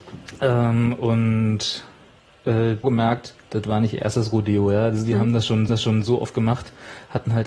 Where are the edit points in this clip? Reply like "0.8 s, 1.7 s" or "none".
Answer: 2.8 s, 3.4 s, 5.7 s